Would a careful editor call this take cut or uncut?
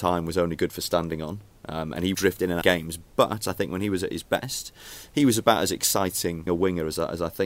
cut